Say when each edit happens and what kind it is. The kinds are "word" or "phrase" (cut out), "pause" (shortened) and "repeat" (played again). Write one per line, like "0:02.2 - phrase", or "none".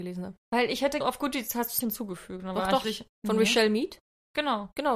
0:01.0 - phrase
0:01.8 - word
0:02.8 - word
0:03.1 - pause